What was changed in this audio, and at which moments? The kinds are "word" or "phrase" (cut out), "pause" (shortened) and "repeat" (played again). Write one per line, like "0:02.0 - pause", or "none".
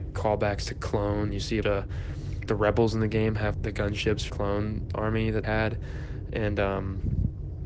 0:01.3 - word
0:01.6 - word
0:02.5 - word
0:03.5 - word
0:04.3 - word
0:05.4 - word